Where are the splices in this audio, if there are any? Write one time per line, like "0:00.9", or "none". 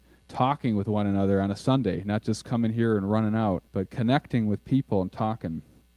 0:03.7